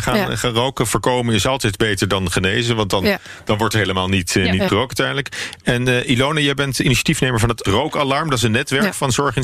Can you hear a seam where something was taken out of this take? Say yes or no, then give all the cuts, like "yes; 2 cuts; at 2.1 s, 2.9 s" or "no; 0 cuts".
yes; 2 cuts; at 4.7 s, 7.7 s